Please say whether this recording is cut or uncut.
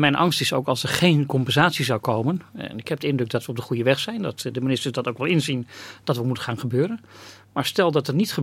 uncut